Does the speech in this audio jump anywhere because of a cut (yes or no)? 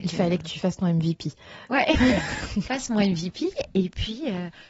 yes